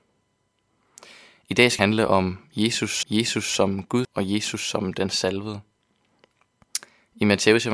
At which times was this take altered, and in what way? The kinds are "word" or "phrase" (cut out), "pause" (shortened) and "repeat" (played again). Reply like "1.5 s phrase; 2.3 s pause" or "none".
1.8 s word; 3.0 s repeat; 4.0 s word